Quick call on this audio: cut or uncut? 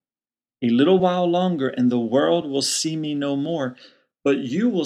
uncut